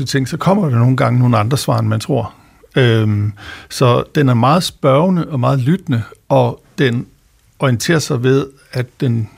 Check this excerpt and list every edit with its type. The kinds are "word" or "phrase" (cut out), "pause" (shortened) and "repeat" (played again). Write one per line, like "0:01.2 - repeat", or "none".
none